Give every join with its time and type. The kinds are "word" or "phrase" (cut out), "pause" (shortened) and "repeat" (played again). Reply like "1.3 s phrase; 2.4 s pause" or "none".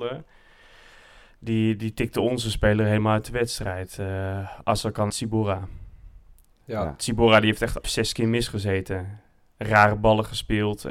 5.1 s word; 7.8 s word